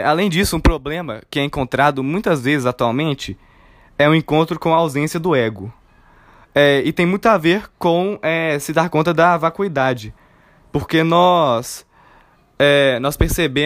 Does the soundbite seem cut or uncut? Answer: uncut